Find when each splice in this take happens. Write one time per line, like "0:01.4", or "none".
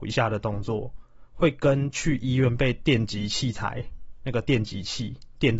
none